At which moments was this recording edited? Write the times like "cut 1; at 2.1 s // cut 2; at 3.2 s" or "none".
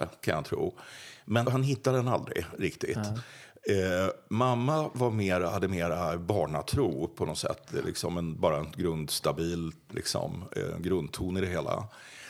cut 1; at 1.4 s